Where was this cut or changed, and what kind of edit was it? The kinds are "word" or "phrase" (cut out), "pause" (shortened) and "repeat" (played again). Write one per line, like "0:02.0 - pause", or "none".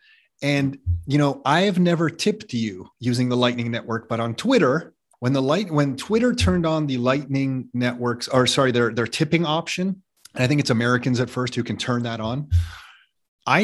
0:02.9 - pause
0:05.1 - pause
0:10.2 - pause